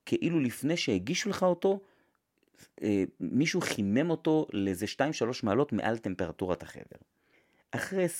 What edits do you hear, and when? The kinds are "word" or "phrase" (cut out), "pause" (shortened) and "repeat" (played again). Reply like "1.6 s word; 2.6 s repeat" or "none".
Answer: none